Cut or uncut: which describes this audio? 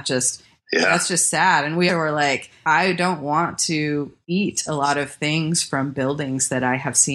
cut